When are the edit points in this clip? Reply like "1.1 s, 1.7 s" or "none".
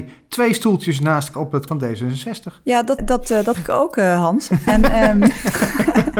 1.3 s, 1.7 s, 3.0 s, 3.5 s